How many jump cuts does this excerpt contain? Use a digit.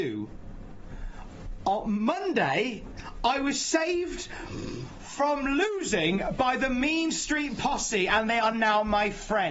0